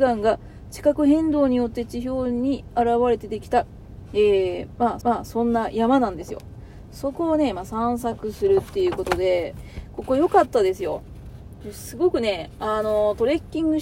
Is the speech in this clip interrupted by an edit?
yes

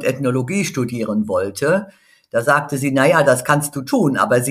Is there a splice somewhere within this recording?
no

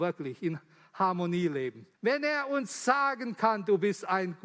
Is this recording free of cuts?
no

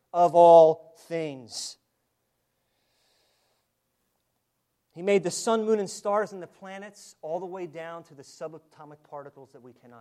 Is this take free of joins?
yes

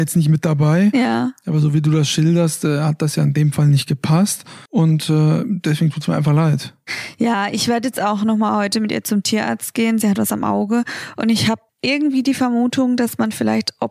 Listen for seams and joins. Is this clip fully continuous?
no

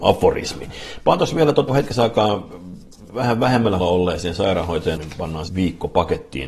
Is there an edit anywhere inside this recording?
yes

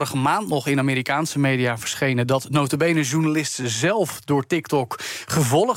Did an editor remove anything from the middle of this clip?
no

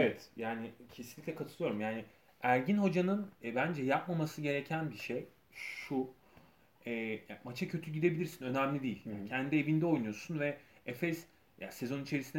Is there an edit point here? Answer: yes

